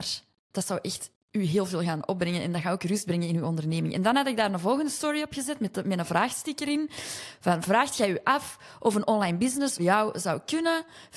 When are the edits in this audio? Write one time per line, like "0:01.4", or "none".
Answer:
0:09.8